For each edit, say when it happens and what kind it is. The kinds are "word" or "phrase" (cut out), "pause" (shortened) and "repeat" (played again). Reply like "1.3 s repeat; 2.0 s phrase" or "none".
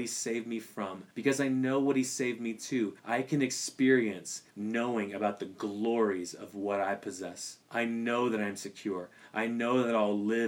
1.1 s pause; 3.0 s pause; 4.5 s pause; 7.6 s pause